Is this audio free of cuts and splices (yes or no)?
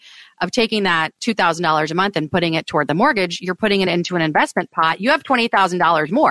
yes